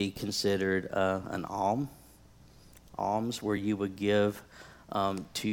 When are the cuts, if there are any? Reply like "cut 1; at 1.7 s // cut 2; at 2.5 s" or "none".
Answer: none